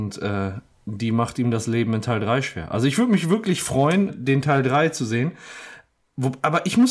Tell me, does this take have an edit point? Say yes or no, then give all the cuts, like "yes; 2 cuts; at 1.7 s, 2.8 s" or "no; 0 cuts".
yes; 1 cut; at 4.1 s